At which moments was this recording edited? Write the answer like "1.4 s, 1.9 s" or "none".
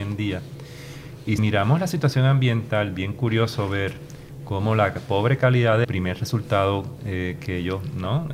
1.4 s, 5.8 s